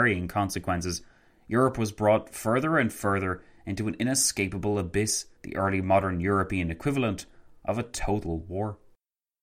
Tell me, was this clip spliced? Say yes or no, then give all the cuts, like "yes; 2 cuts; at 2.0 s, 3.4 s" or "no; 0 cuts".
yes; 1 cut; at 5.4 s